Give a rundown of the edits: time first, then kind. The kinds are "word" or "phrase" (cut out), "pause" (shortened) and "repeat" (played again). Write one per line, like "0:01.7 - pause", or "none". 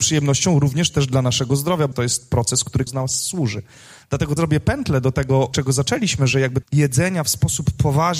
0:01.9 - word
0:02.9 - word
0:04.4 - word
0:05.5 - word
0:06.6 - word